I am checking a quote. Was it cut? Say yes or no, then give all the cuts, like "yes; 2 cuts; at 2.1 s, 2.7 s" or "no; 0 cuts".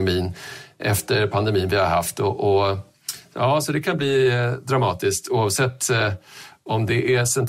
no; 0 cuts